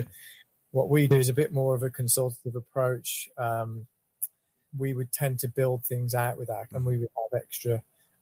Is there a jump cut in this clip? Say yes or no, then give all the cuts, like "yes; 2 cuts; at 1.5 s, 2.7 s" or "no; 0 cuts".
yes; 2 cuts; at 4.6 s, 6.7 s